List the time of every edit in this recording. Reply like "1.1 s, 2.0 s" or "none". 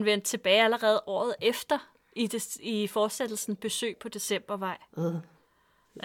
none